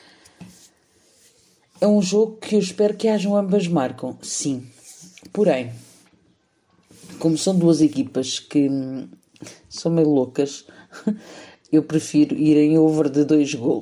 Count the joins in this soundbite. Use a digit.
0